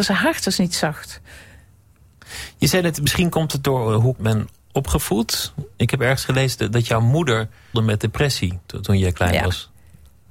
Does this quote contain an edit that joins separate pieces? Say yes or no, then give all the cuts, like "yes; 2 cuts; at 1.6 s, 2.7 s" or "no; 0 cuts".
yes; 2 cuts; at 4.2 s, 7.7 s